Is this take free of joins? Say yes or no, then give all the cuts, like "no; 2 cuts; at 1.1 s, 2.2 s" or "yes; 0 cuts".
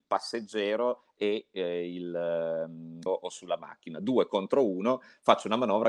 no; 1 cut; at 3.1 s